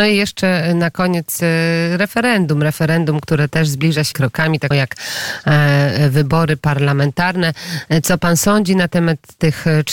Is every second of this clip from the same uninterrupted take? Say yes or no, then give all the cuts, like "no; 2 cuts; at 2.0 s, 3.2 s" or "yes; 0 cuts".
no; 2 cuts; at 4.1 s, 4.7 s